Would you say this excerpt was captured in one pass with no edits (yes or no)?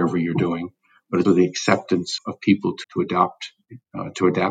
no